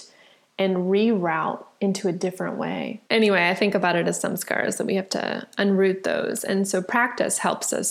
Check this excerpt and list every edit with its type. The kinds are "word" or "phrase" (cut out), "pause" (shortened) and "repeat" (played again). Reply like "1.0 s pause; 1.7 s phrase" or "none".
3.1 s pause

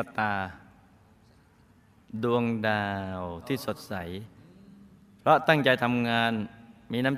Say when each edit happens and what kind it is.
none

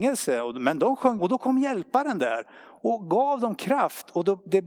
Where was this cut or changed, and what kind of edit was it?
1.2 s word

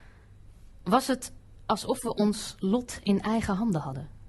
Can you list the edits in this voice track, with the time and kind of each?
none

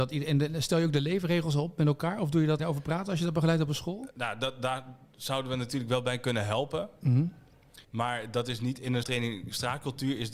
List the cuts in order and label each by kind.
2.6 s phrase; 7.8 s pause; 9.0 s word

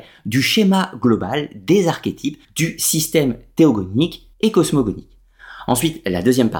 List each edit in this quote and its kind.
2.4 s pause; 4.3 s pause

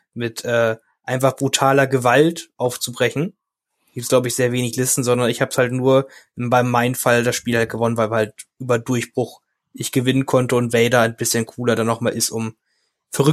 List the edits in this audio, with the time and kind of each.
none

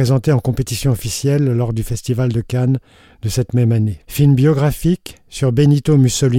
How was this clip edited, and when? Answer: 4.0 s pause

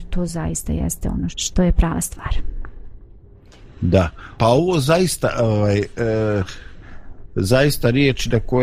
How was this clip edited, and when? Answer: 1.3 s word; 4.4 s word

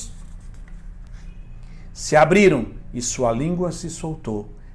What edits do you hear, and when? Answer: none

